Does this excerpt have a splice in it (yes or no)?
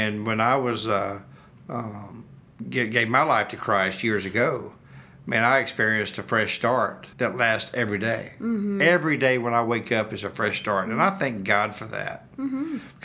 yes